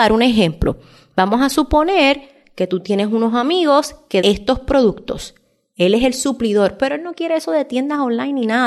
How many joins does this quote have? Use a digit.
1